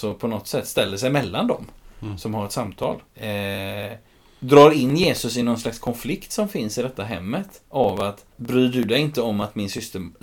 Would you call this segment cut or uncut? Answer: cut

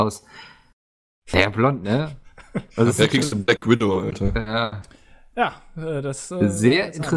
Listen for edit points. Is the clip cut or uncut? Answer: cut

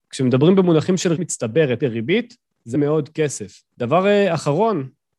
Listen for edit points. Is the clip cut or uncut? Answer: cut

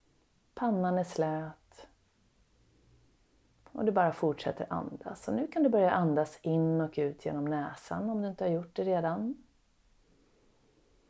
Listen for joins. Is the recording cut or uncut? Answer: uncut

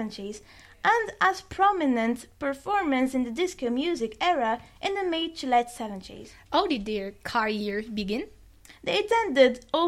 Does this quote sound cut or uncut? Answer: uncut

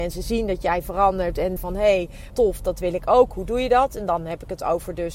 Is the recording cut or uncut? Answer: cut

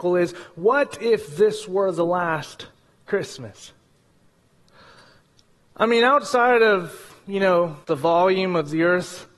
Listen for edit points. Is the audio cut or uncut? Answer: cut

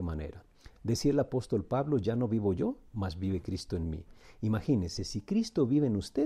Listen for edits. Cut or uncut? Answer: uncut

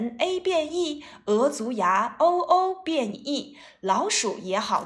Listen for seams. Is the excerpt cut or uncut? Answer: cut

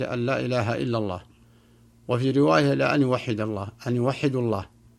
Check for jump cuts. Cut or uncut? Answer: uncut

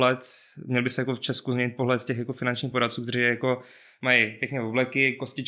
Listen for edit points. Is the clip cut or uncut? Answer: uncut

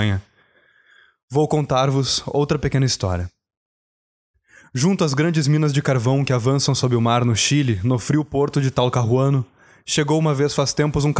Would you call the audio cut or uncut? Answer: uncut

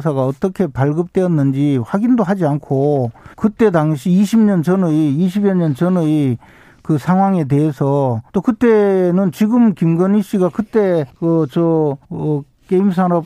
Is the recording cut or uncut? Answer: cut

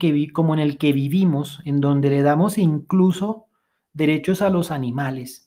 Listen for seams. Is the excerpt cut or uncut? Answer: uncut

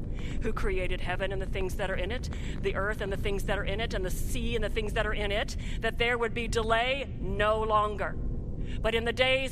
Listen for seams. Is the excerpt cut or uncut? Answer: uncut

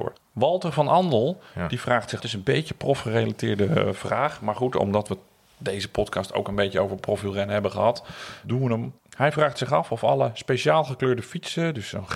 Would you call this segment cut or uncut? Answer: cut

